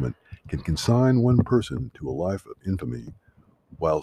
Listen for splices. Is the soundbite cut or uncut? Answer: uncut